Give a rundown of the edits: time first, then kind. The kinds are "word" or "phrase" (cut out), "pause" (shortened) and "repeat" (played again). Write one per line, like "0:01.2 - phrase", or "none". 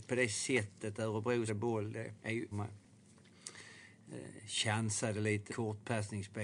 0:01.5 - word
0:02.2 - pause
0:02.5 - phrase
0:05.5 - word